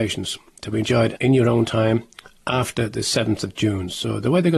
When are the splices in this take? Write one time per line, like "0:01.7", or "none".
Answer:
0:01.2